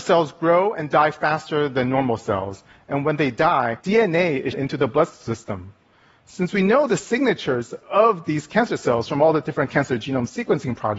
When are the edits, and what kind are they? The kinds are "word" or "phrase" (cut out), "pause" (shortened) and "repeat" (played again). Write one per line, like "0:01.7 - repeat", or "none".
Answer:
0:03.8 - pause
0:04.5 - word